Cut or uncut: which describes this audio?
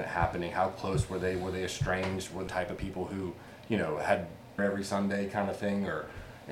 cut